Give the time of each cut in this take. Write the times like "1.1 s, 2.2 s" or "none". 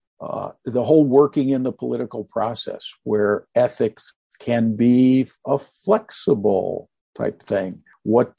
none